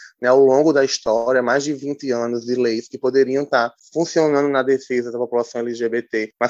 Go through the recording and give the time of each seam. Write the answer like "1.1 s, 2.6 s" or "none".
none